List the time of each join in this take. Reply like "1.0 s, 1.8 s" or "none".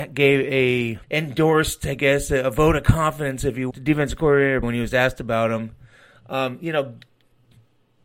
1.0 s, 3.7 s, 4.6 s